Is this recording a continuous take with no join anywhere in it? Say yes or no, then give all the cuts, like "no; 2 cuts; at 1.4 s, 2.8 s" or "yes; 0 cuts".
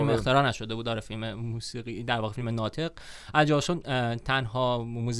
yes; 0 cuts